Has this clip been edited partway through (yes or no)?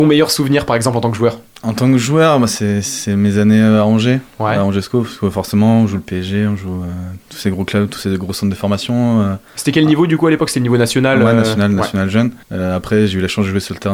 yes